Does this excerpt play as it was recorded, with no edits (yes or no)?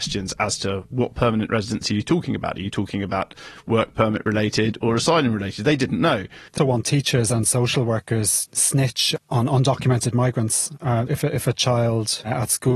no